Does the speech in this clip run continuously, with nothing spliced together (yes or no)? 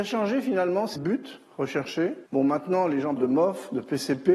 no